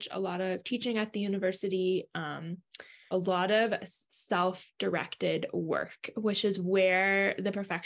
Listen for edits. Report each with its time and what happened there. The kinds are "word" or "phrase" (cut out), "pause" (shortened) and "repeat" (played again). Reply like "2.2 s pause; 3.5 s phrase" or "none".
3.1 s word; 4.1 s pause